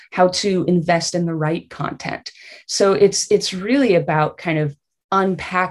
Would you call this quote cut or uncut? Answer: uncut